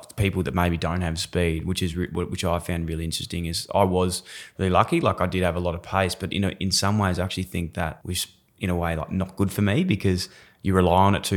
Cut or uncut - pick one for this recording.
uncut